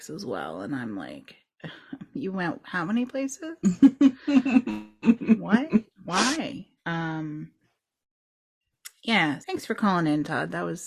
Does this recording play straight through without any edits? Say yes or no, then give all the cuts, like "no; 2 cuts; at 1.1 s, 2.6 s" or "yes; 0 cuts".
no; 2 cuts; at 6.8 s, 9.4 s